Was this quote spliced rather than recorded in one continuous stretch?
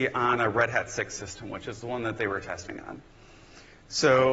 no; 0 cuts

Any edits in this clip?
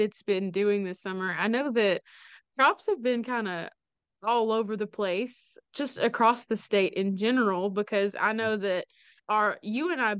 no; 0 cuts

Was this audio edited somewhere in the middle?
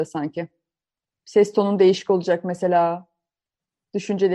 no; 0 cuts

